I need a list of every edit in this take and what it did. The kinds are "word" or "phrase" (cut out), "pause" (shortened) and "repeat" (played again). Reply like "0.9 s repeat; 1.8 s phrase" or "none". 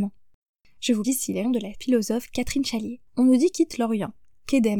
1.0 s word; 1.4 s word; 3.1 s pause; 3.5 s phrase

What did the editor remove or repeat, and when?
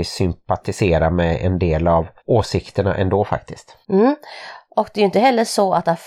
2.2 s pause; 3.8 s pause

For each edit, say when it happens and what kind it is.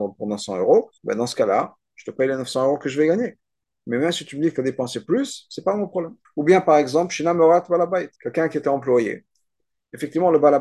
1.0 s pause; 6.2 s pause; 8.2 s pause

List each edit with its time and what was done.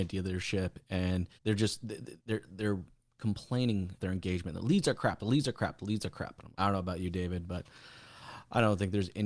1.4 s pause; 2.2 s pause; 4.0 s word; 6.5 s word

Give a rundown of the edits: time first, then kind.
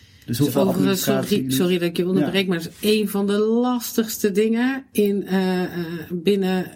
none

